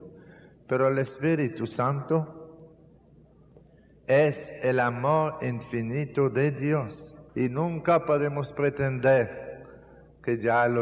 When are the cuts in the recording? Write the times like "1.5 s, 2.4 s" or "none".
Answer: 7.3 s